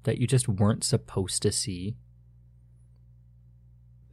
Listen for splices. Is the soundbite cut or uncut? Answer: uncut